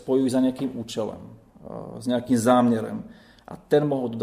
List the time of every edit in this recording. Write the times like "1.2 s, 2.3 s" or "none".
none